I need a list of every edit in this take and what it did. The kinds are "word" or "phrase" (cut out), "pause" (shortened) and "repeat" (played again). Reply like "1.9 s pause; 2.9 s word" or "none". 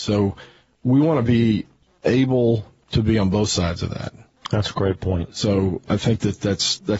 5.8 s word